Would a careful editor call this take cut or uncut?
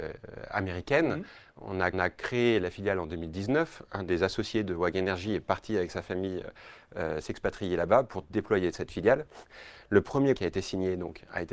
cut